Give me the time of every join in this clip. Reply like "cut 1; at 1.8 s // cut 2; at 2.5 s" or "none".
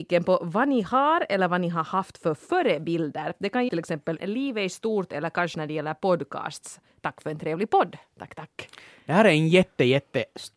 cut 1; at 3.7 s // cut 2; at 4.2 s // cut 3; at 5.5 s